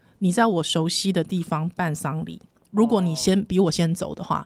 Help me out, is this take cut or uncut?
uncut